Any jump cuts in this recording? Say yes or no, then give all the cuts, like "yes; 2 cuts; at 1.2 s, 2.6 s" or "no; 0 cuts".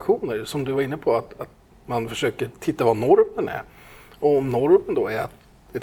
no; 0 cuts